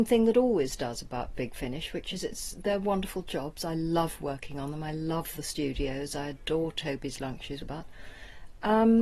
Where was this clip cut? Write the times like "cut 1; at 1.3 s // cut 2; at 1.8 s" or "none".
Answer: cut 1; at 7.6 s